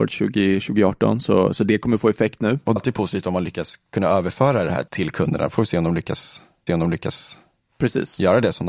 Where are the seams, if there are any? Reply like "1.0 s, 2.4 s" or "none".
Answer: 2.8 s, 4.9 s, 6.7 s